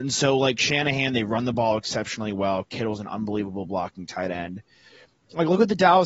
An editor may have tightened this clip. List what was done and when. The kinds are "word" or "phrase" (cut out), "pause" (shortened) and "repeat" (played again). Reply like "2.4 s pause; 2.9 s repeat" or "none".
none